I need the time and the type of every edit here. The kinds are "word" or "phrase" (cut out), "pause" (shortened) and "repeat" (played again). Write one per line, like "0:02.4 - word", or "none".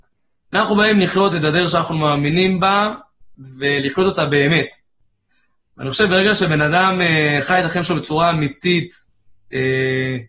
none